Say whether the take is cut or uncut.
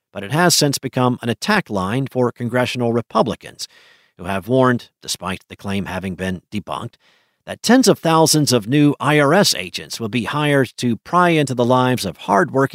uncut